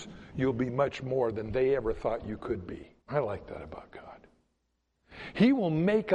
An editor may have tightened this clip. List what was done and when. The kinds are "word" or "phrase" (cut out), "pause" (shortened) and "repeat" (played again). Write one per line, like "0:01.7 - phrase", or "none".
0:03.0 - pause